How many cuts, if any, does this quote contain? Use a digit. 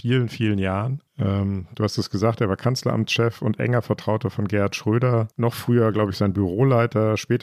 2